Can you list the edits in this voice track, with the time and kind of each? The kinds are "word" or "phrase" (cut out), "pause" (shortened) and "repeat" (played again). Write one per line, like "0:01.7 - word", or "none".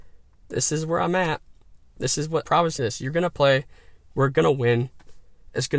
0:01.8 - pause
0:02.4 - word
0:02.8 - word